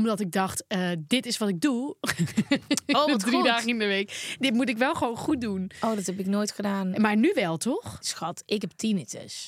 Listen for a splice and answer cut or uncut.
uncut